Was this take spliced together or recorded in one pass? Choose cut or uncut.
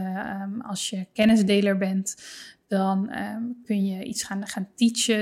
uncut